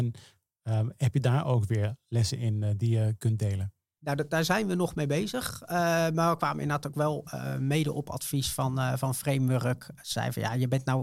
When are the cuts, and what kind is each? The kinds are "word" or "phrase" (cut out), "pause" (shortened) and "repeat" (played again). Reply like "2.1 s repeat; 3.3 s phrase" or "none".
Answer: none